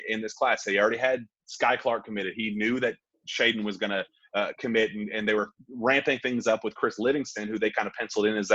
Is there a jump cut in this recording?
no; 0 cuts

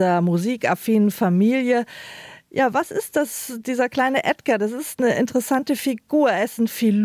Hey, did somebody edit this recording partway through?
no; 0 cuts

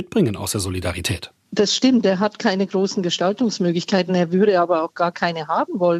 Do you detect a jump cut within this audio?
no; 0 cuts

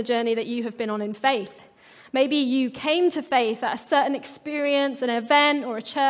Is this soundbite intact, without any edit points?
yes; 0 cuts

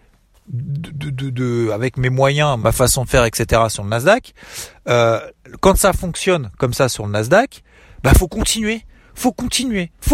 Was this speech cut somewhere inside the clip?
yes; 1 cut; at 2.6 s

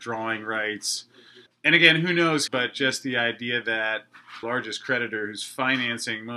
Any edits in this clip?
yes; 3 cuts; at 1.5 s, 2.5 s, 4.4 s

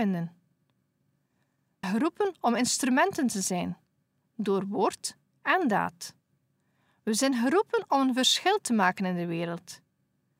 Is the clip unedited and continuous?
no; 1 cut; at 1.8 s

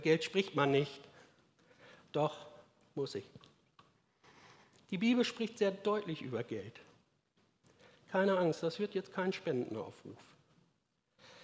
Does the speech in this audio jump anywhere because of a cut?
no; 0 cuts

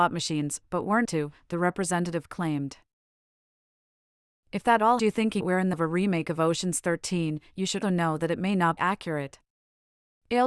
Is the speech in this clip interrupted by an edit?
yes; 6 cuts; at 1.0 s, 5.0 s, 5.4 s, 5.7 s, 7.8 s, 8.8 s

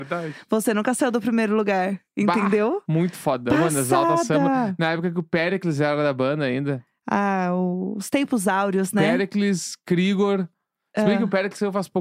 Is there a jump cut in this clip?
no; 0 cuts

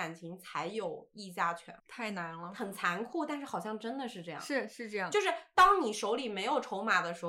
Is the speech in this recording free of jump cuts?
no; 1 cut; at 1.8 s

